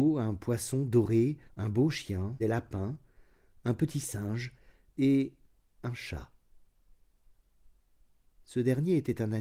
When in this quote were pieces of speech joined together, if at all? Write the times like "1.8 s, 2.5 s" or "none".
1.5 s, 2.4 s